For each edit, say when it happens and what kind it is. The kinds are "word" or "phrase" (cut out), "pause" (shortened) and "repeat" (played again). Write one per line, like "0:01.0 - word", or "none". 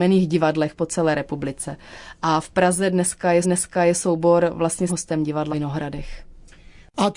0:03.4 - repeat
0:04.9 - word
0:05.5 - word